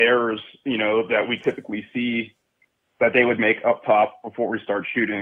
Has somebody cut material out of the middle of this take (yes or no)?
no